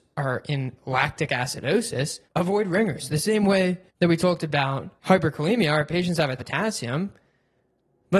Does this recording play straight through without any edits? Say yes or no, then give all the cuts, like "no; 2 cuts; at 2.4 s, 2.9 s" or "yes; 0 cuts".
no; 4 cuts; at 2.3 s, 3.9 s, 5.0 s, 6.4 s